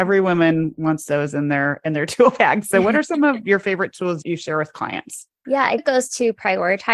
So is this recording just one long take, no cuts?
no; 3 cuts; at 4.2 s, 5.4 s, 5.8 s

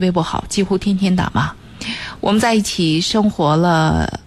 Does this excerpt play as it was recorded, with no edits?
yes; 0 cuts

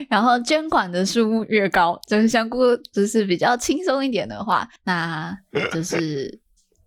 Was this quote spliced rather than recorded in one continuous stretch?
yes; 1 cut; at 4.8 s

